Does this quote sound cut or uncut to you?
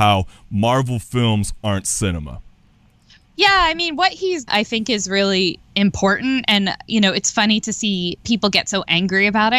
cut